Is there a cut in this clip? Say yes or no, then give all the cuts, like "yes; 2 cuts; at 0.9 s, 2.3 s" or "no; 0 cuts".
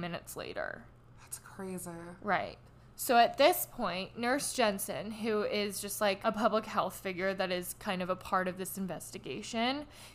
no; 0 cuts